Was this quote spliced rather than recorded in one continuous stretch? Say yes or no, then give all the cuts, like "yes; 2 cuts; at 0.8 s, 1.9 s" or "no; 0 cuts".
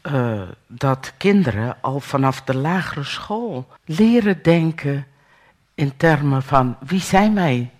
yes; 1 cut; at 3.8 s